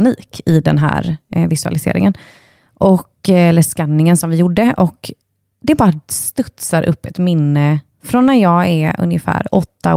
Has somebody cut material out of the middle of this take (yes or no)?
no